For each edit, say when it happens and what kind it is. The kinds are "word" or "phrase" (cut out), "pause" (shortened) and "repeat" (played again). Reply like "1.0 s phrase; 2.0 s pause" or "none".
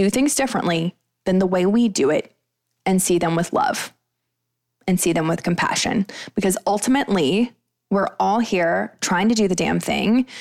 none